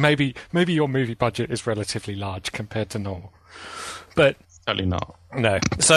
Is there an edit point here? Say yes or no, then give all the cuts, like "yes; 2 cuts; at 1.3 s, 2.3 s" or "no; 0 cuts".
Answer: yes; 1 cut; at 4.4 s